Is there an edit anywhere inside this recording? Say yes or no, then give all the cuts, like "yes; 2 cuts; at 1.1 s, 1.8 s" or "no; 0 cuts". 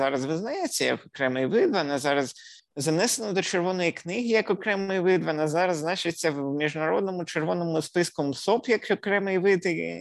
yes; 1 cut; at 2.6 s